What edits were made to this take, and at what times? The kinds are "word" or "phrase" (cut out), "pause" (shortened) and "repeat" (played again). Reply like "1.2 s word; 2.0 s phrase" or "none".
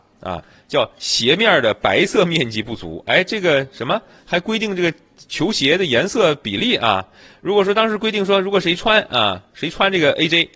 none